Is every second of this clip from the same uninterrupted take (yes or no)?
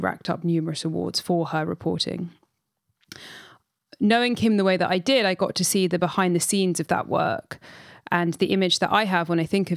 yes